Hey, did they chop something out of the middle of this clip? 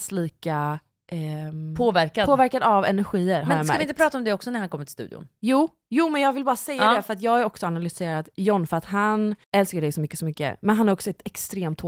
yes; 1 cut; at 9.4 s

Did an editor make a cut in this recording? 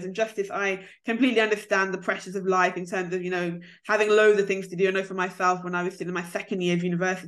no; 0 cuts

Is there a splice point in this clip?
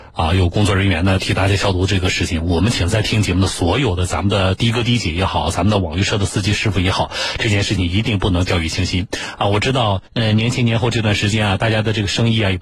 yes; 1 cut; at 10.1 s

